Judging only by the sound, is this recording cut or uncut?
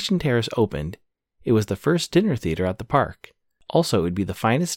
uncut